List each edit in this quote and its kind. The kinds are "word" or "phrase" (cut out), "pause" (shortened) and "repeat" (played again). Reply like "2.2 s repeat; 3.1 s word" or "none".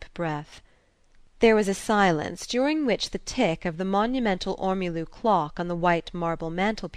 none

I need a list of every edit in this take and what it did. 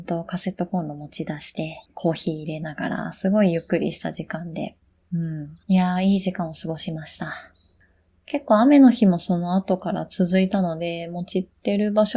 1.9 s pause; 5.6 s pause

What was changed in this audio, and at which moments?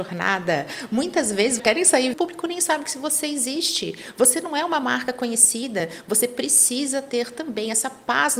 1.6 s phrase; 2.1 s phrase

